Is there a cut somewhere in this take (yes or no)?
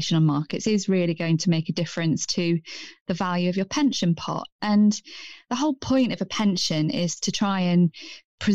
no